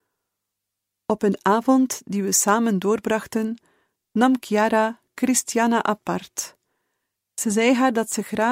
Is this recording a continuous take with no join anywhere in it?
yes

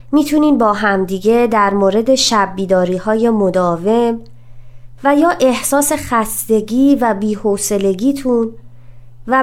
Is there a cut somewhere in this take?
no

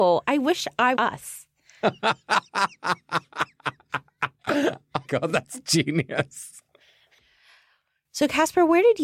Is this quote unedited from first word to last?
no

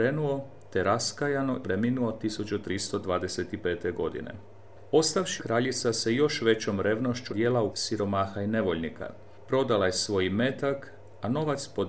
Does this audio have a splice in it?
yes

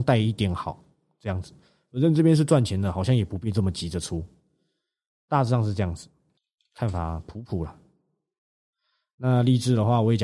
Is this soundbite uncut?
no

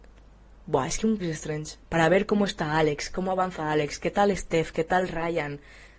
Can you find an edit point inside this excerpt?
yes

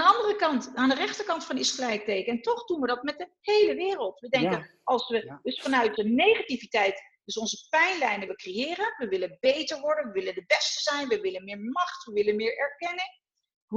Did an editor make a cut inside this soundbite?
yes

